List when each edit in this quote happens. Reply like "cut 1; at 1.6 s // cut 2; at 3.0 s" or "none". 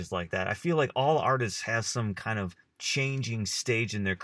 none

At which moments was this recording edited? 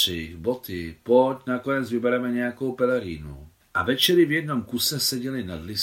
cut 1; at 3.6 s

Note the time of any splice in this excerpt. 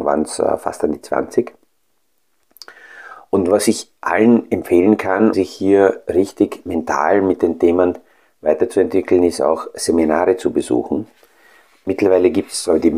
cut 1; at 5.3 s

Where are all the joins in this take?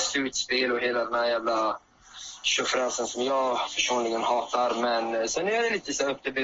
none

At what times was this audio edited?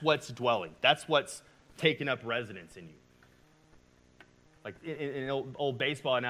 cut 1; at 4.8 s

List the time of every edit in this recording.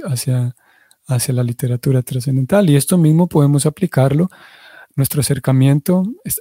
none

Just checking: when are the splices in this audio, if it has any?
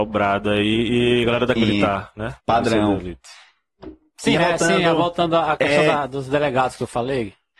cut 1; at 1.6 s // cut 2; at 2.4 s // cut 3; at 4.4 s

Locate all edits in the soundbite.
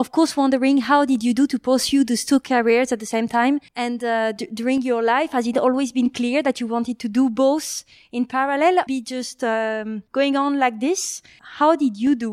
cut 1; at 3.7 s // cut 2; at 8.9 s // cut 3; at 10.1 s

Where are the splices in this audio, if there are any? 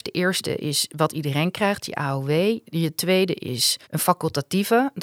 cut 1; at 3.8 s

